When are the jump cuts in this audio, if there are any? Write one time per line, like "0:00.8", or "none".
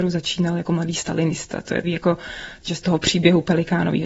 0:01.8
0:02.8